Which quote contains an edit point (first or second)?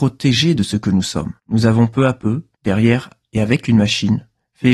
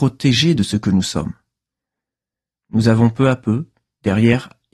first